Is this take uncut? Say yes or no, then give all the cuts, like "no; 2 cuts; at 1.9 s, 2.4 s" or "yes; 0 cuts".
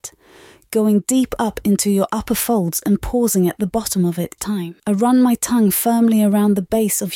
no; 2 cuts; at 4.4 s, 4.8 s